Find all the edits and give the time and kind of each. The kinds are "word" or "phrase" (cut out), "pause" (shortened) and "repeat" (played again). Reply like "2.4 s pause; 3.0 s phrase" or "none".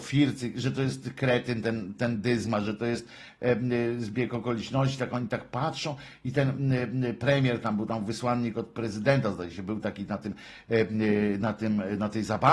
none